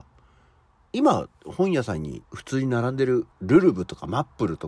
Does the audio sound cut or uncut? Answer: cut